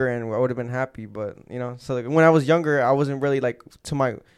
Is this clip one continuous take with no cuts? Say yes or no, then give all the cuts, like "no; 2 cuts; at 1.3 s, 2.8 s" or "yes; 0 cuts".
yes; 0 cuts